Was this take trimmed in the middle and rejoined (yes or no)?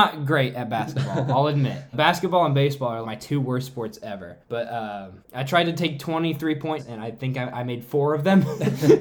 yes